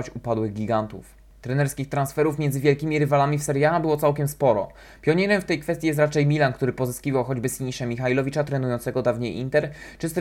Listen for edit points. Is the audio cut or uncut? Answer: uncut